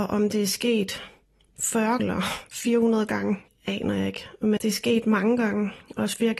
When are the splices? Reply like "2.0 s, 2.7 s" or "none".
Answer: 2.0 s, 3.5 s, 4.6 s